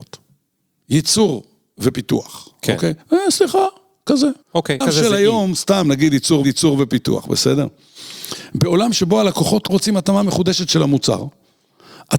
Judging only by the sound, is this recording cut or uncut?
cut